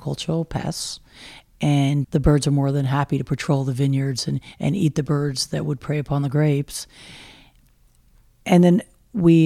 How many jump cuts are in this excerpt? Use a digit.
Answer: 1